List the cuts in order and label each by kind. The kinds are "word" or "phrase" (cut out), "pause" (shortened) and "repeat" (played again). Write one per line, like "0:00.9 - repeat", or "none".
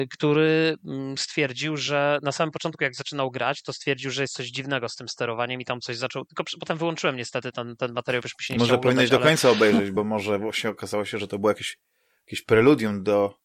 none

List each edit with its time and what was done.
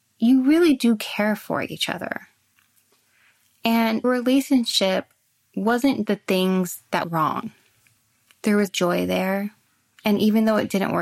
0:04.0 - word
0:06.1 - word
0:07.0 - word
0:08.7 - word

